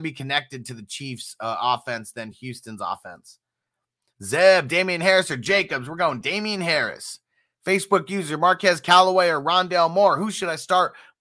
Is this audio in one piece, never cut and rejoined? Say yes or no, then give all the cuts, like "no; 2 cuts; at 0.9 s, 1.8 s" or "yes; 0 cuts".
yes; 0 cuts